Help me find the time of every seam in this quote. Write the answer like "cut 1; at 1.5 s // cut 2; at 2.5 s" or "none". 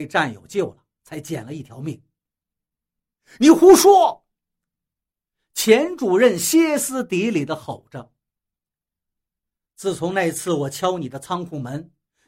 none